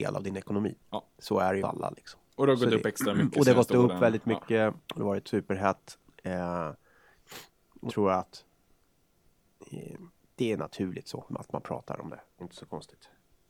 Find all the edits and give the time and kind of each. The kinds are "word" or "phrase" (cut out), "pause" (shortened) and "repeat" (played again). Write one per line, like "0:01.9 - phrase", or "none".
0:01.1 - pause
0:01.6 - phrase
0:04.8 - pause
0:07.9 - word
0:10.1 - pause
0:11.3 - word
0:12.4 - word

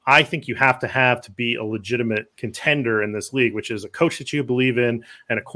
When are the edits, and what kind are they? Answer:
0:02.3 - pause

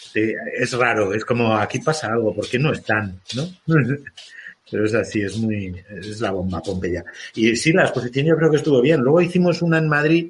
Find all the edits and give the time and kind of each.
none

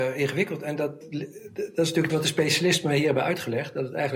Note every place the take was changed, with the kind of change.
0:01.0 - word
0:02.1 - phrase

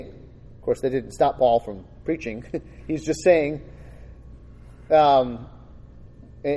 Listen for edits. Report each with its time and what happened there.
none

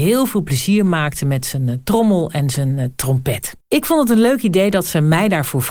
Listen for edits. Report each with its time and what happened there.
0:03.6 - pause

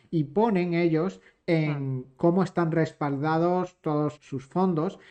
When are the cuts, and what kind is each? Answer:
0:04.1 - word

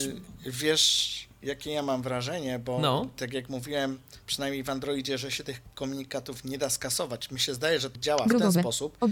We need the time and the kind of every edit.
0:07.9 - word

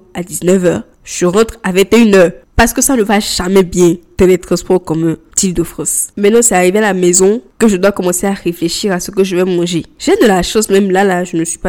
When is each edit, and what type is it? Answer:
0:06.1 - pause

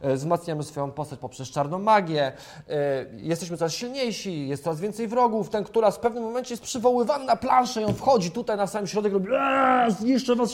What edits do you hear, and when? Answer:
none

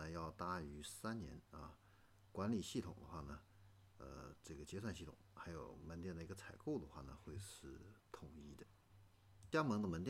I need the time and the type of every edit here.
none

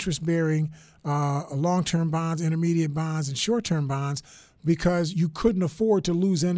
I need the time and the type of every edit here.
0:05.1 - phrase

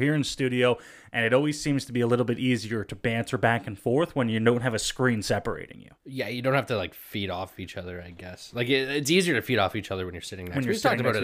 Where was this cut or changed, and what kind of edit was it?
0:06.0 - pause

